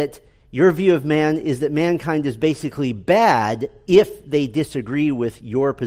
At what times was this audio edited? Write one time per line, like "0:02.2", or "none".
none